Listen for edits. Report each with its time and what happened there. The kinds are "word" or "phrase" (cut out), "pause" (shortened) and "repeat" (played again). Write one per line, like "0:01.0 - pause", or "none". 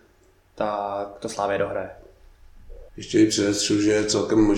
0:02.9 - pause